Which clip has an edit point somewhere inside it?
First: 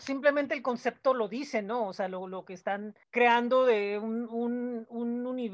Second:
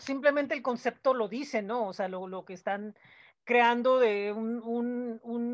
first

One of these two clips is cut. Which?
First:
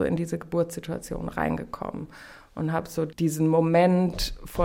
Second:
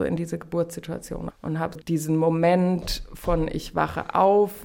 second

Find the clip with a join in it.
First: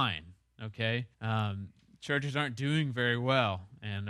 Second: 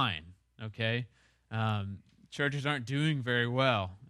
first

